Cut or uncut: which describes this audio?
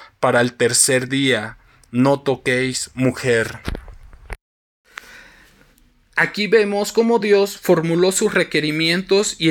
uncut